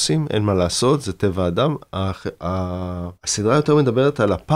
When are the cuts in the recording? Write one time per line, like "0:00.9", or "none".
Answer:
0:03.1